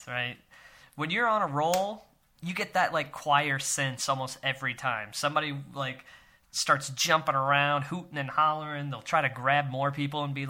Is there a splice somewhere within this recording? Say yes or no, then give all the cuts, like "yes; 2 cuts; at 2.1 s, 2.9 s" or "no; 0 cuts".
no; 0 cuts